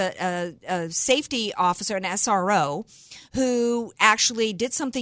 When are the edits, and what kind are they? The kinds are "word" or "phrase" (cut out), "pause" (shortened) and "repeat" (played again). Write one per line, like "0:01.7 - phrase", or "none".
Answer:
none